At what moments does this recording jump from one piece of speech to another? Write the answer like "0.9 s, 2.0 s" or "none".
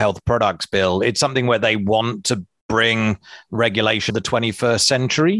4.1 s

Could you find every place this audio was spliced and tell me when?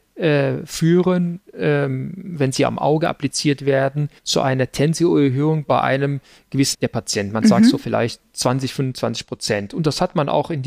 4.2 s, 6.7 s

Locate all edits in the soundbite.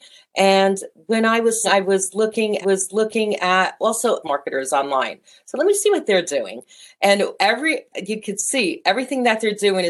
1.6 s, 2.6 s, 4.2 s, 7.9 s

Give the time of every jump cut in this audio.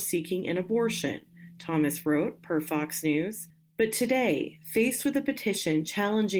none

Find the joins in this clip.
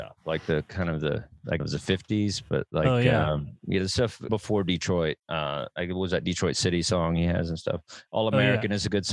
1.6 s, 4.3 s, 5.2 s

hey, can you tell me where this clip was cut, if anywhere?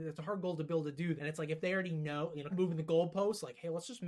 1.2 s, 2.5 s

